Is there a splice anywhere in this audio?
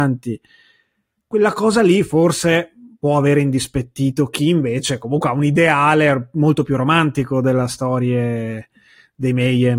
no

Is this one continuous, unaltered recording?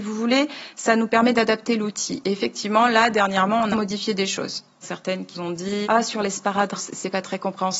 no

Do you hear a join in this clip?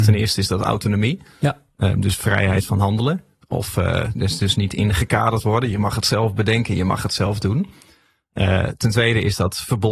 no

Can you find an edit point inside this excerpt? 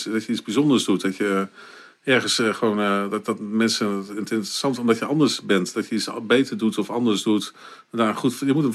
no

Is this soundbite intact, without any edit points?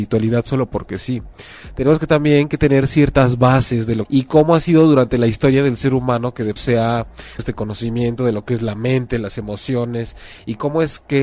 no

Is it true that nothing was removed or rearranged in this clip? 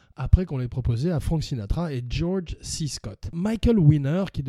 yes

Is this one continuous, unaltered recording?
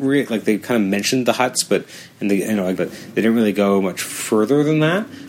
no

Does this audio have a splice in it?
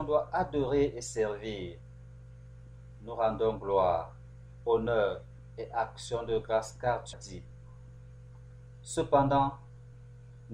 yes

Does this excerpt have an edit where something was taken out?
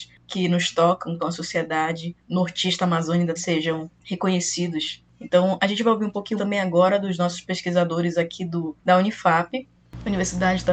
yes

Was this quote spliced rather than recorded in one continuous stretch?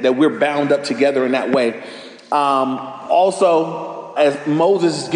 yes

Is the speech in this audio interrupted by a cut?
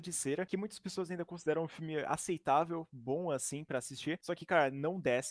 no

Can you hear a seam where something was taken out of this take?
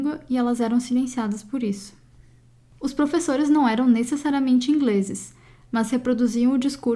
no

